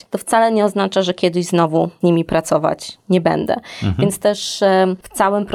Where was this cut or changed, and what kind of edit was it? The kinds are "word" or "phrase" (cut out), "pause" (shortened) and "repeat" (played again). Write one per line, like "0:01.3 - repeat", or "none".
none